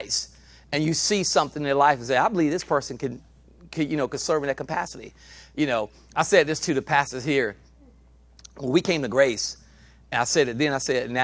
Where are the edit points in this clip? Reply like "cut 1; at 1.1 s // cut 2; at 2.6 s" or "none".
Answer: none